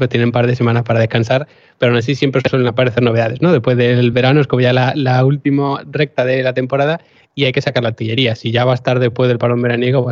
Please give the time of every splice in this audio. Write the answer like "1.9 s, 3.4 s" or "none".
none